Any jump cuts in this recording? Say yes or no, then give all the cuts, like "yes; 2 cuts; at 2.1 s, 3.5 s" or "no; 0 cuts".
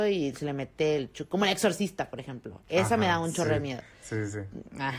no; 0 cuts